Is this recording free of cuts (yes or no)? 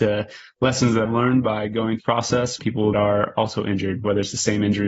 no